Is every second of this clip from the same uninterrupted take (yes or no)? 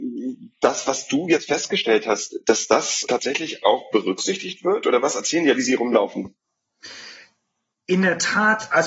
no